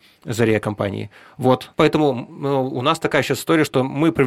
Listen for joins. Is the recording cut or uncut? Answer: cut